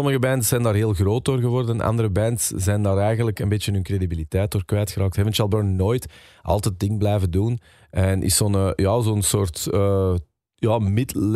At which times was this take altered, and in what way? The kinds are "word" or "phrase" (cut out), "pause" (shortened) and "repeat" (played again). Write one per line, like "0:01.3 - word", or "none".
none